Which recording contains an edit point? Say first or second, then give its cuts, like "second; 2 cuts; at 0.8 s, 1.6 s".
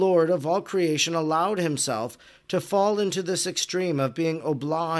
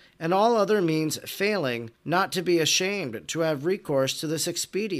second; 1 cut; at 2.0 s